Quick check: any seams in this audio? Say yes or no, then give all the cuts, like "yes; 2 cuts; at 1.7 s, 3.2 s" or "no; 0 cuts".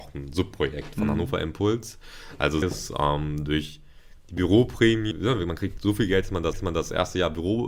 yes; 4 cuts; at 2.6 s, 5.1 s, 5.8 s, 6.5 s